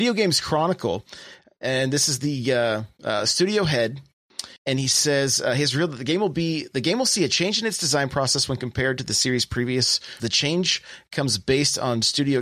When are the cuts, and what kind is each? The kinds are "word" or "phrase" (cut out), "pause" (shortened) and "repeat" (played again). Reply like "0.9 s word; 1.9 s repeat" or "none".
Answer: 4.6 s pause; 10.2 s word